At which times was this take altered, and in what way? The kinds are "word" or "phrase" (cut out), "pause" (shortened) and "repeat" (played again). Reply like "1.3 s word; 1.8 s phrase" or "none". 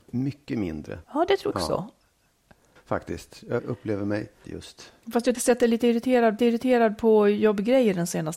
1.0 s pause; 1.5 s word; 2.8 s pause; 3.6 s word; 4.4 s phrase; 5.3 s phrase; 6.4 s repeat